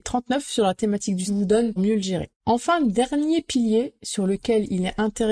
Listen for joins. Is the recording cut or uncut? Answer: cut